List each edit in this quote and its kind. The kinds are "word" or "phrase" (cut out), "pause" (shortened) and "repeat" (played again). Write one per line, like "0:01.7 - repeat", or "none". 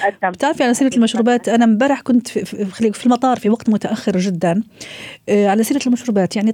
none